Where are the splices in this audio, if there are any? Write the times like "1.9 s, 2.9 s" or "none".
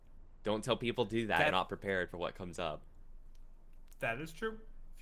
1.5 s